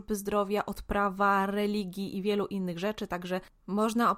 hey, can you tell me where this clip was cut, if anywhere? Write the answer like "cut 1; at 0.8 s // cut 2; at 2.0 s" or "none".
none